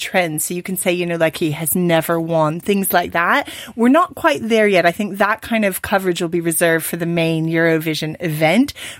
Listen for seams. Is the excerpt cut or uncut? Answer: cut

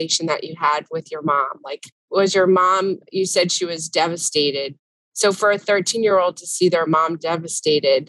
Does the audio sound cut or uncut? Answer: uncut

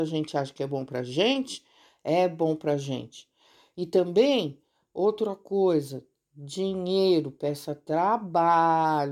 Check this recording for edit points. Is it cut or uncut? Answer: uncut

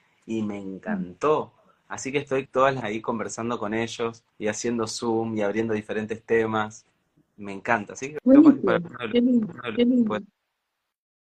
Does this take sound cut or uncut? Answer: cut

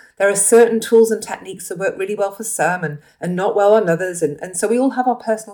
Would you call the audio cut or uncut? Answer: uncut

